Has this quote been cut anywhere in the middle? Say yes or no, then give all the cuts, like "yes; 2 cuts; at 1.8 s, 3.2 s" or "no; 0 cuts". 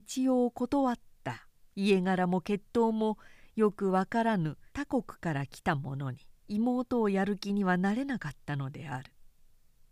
yes; 3 cuts; at 1.6 s, 4.7 s, 6.4 s